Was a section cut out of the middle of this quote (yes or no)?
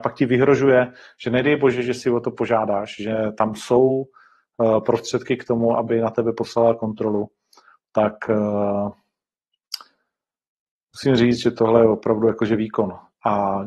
no